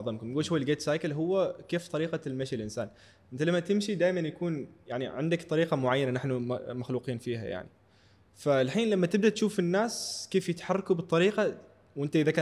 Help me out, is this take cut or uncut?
uncut